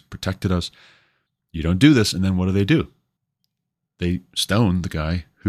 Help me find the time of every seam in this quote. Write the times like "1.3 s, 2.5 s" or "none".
none

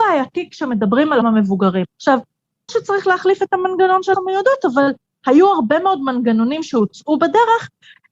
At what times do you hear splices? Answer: 1.2 s, 2.7 s, 4.1 s

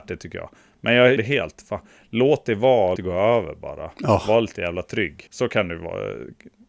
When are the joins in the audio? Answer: 1.2 s, 3.0 s, 5.3 s

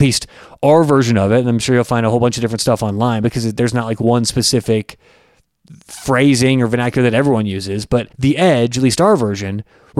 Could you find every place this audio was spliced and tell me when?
8.1 s

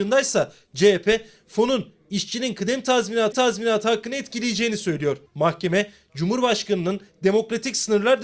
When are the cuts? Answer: 3.3 s, 5.3 s

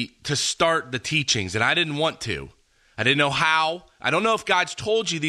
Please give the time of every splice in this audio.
none

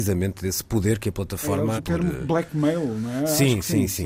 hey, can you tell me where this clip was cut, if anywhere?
1.8 s

